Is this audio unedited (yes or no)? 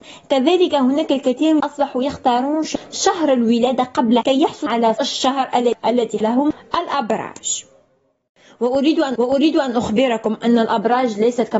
no